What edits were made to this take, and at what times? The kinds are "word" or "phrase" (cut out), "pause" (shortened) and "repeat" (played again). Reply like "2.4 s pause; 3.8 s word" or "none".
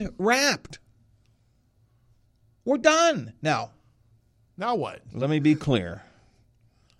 none

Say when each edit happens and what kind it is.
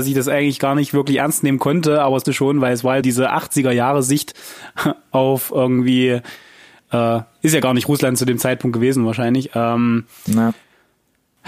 2.2 s word; 3.0 s word

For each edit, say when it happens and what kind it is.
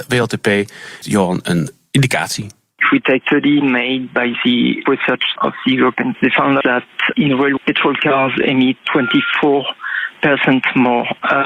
1.0 s word; 3.2 s word; 4.9 s word; 5.4 s word; 6.1 s word; 6.6 s word; 7.1 s word; 7.6 s word; 8.8 s word

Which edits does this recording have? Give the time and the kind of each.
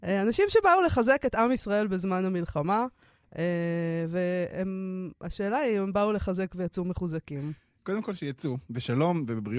none

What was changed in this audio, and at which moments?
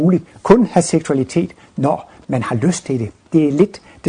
none

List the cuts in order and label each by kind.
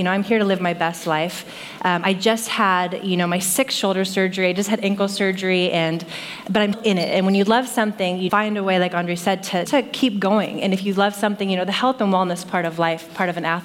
6.7 s word; 8.3 s word; 9.7 s word

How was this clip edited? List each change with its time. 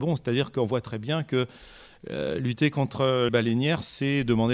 3.3 s word

